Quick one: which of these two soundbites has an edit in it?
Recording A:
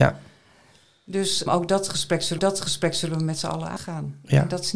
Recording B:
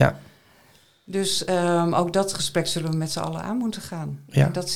A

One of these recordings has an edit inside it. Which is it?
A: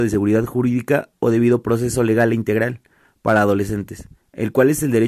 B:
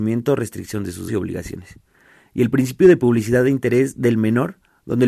B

